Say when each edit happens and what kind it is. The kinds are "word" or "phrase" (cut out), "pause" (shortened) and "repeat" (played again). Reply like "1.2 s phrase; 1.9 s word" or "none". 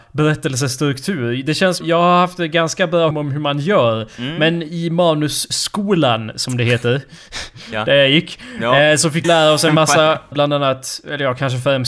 1.8 s word; 3.1 s word; 9.2 s word; 10.3 s phrase